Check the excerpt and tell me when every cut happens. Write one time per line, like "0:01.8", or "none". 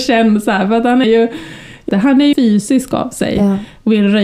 0:01.0
0:01.9
0:02.3

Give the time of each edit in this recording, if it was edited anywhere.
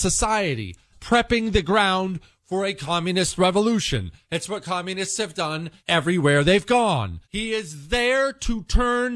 0:00.9
0:05.8
0:07.2

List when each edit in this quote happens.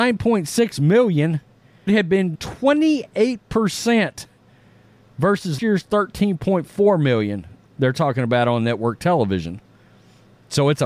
0:01.9
0:02.3
0:05.6

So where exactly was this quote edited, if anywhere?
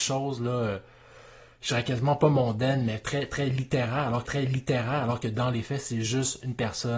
0:04.2

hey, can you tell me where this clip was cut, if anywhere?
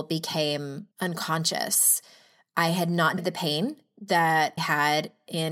0:00.9
0:03.2
0:04.6

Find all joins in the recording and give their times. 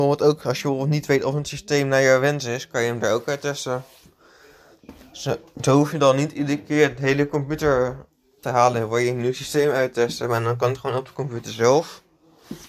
0:08.4

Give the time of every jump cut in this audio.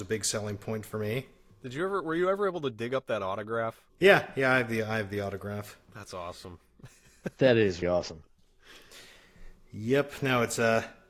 0:01.5
0:03.9
0:07.8

